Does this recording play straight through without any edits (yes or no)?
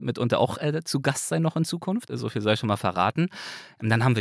yes